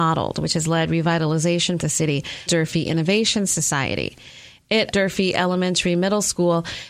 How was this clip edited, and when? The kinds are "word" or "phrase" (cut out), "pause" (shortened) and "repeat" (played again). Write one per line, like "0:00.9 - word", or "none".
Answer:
0:01.8 - phrase
0:02.5 - phrase
0:04.9 - word

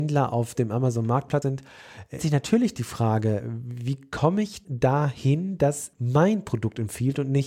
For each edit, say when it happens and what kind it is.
0:01.4 - word
0:02.2 - word
0:03.4 - word
0:04.6 - word
0:05.9 - word

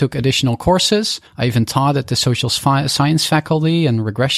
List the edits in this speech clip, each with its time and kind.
0:01.3 - pause

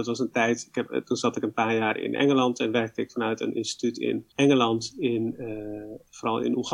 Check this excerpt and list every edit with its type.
0:04.3 - pause

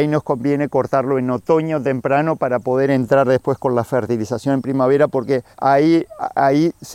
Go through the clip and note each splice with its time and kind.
0:05.5 - pause

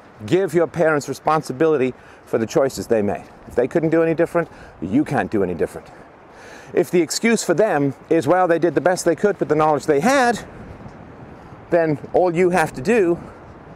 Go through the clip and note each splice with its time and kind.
none

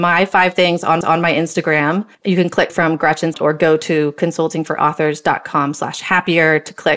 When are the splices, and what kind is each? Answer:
0:01.0 - repeat
0:02.1 - pause
0:02.7 - word
0:03.3 - word

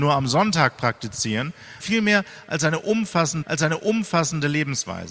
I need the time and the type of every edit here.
0:01.8 - word
0:03.4 - repeat

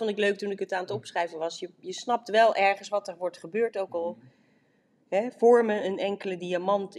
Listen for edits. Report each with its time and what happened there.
none

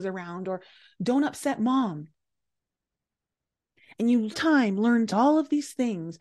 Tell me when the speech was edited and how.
0:04.3 - phrase
0:05.1 - word

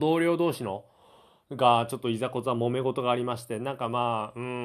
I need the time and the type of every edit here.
none

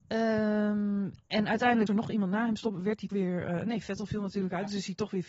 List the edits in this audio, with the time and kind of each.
0:01.9 - word
0:03.1 - word
0:04.1 - word

